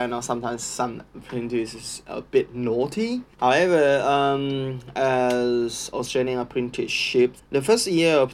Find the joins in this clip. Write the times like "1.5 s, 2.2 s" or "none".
3.3 s, 7.4 s